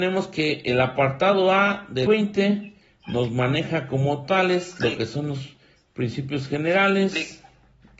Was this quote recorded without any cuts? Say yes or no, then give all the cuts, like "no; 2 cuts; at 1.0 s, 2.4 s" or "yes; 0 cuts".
no; 1 cut; at 2.1 s